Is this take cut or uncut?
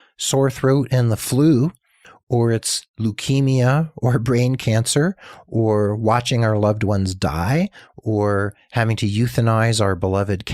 uncut